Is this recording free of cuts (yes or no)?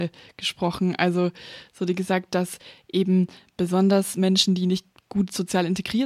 yes